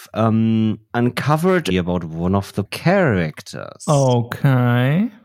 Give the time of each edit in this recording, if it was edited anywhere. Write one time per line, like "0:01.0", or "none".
0:01.7
0:02.7